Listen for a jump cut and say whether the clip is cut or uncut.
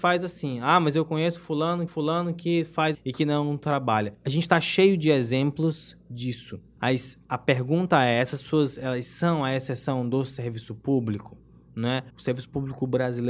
cut